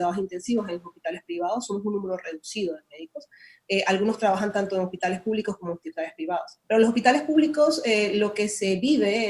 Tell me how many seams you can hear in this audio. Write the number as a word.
one